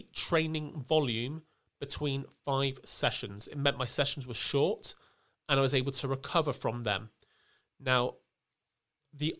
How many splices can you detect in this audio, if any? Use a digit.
0